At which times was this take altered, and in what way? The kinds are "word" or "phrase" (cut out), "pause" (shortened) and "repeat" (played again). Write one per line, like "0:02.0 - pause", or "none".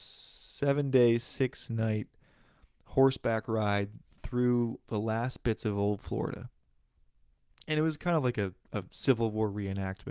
none